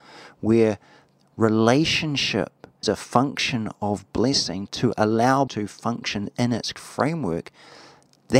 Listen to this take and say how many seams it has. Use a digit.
4